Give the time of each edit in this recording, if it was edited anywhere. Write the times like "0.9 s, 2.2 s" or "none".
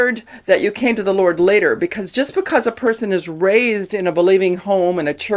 none